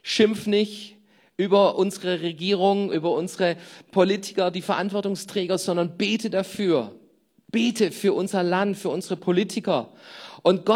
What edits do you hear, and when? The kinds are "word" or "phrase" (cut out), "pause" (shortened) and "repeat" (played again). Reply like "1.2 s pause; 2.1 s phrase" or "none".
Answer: none

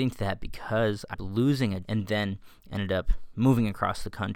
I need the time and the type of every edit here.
1.1 s word; 1.8 s word

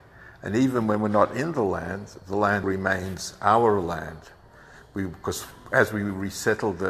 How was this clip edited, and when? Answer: 2.6 s word

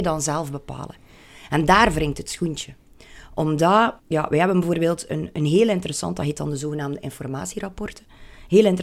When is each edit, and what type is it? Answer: 4.0 s pause

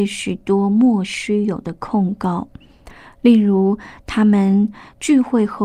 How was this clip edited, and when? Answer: none

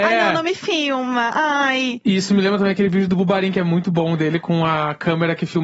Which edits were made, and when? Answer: none

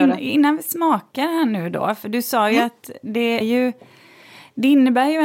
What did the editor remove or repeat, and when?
3.4 s phrase

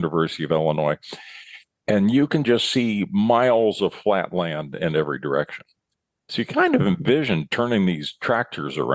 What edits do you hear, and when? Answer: none

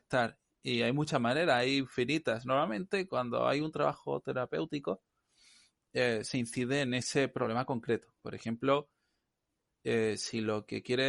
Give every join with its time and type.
8.2 s pause

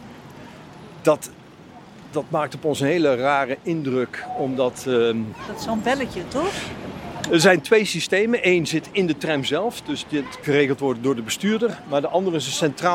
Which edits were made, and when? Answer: 10.4 s word

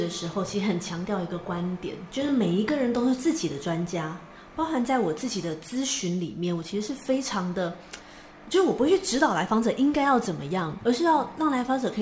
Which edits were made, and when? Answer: 10.8 s word

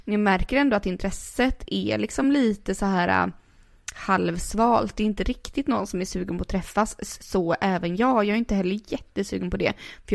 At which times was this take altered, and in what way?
none

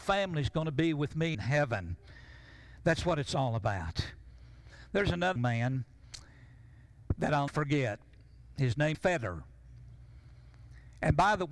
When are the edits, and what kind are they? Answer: 1.3 s word; 5.4 s word; 7.5 s word; 8.9 s word

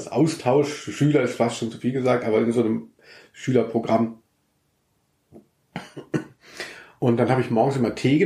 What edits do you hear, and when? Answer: none

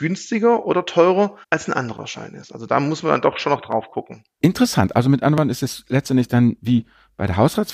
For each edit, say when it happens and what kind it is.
1.4 s pause

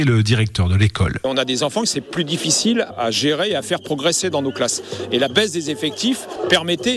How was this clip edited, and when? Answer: none

